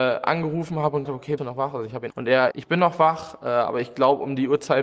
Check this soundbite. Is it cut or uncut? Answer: cut